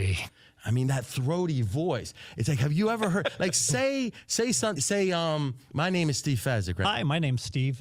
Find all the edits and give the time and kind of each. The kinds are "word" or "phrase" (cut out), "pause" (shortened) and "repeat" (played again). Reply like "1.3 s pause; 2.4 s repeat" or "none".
4.8 s word